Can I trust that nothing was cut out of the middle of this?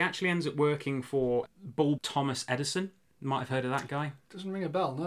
no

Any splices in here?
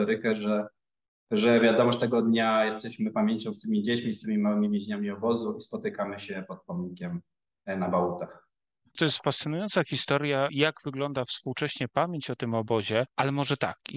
no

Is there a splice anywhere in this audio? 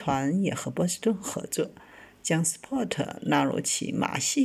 no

